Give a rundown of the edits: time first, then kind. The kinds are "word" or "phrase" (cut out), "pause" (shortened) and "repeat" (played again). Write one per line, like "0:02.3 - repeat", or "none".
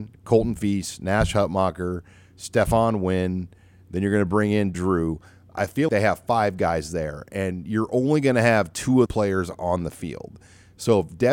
0:04.7 - word
0:05.9 - word
0:09.1 - word